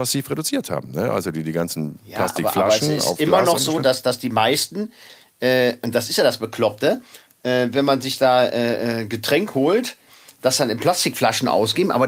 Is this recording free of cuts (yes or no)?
yes